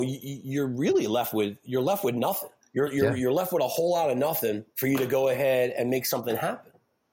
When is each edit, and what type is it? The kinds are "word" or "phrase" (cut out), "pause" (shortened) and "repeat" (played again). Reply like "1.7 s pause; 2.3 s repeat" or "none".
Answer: 2.6 s pause; 4.7 s pause